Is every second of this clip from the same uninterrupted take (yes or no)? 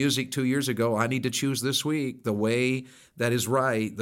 yes